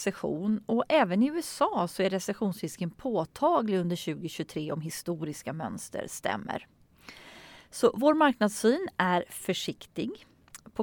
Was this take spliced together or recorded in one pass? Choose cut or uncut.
uncut